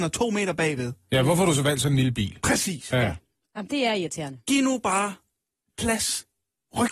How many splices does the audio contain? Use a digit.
0